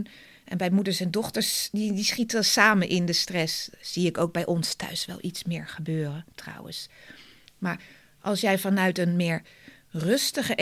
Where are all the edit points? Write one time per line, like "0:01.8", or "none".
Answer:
none